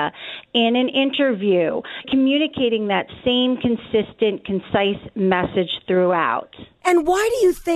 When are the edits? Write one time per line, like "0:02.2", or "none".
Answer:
0:02.0